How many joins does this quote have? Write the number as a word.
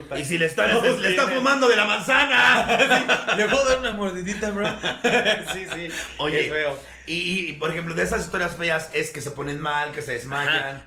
zero